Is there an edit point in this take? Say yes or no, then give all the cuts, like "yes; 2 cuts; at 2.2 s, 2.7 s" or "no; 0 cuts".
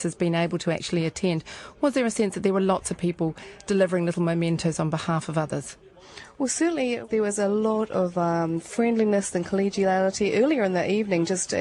no; 0 cuts